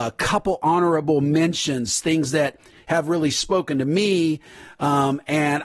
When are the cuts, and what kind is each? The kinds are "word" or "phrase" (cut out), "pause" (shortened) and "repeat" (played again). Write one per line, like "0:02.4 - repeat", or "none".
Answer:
none